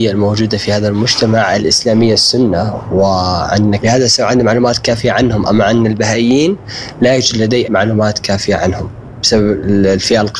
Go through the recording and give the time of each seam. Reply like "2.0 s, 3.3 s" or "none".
3.8 s, 7.6 s